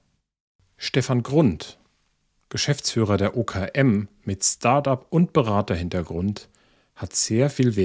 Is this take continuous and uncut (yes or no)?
yes